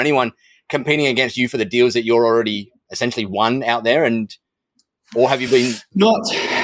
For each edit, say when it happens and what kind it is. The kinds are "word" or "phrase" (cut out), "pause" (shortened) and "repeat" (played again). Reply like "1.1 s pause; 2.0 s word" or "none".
none